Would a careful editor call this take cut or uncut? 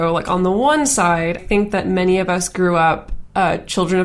cut